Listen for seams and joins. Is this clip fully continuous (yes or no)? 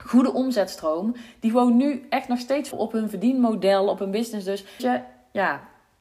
no